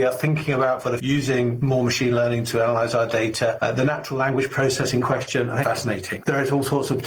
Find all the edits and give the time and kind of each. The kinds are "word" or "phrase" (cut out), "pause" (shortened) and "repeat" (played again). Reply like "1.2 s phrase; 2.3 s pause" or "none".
1.0 s word; 5.6 s word